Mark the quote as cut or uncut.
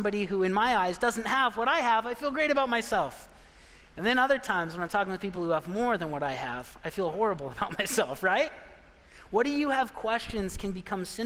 uncut